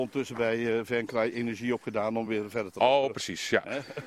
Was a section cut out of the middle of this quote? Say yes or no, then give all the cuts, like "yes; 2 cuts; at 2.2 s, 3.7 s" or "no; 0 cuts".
no; 0 cuts